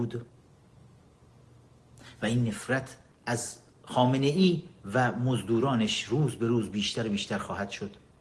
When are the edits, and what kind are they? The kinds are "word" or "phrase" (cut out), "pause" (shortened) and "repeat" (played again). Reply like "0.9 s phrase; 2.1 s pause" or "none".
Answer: none